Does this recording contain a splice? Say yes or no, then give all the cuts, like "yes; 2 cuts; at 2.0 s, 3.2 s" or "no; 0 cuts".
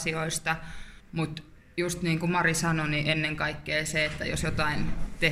no; 0 cuts